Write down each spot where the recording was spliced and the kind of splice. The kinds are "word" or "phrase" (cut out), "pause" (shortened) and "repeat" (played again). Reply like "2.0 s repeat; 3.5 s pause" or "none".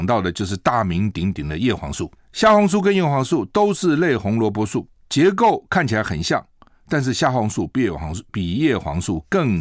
none